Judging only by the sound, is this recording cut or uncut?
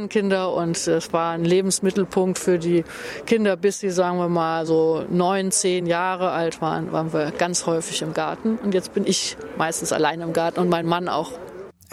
uncut